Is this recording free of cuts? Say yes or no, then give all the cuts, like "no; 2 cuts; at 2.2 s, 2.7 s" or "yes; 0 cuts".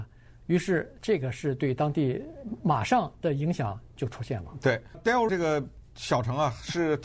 no; 2 cuts; at 4.9 s, 5.3 s